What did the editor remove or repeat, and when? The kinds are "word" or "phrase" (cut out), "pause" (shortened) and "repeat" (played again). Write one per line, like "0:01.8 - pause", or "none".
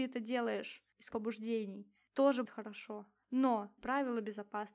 0:01.1 - word
0:02.5 - word
0:03.8 - word